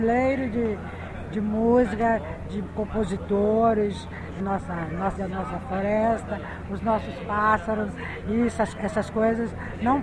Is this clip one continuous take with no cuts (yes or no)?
no